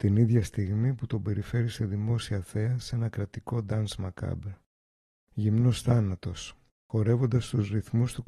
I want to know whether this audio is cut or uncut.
uncut